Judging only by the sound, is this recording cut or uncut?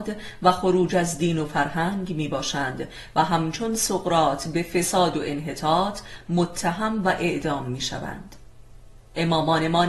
uncut